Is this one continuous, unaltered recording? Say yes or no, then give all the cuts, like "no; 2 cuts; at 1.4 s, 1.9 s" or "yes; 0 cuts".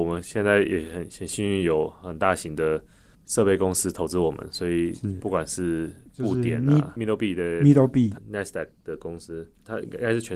yes; 0 cuts